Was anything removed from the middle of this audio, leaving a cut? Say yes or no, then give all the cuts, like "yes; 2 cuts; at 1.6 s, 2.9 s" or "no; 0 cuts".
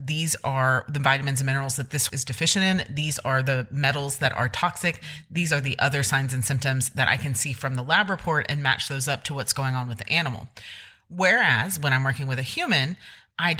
yes; 1 cut; at 2.1 s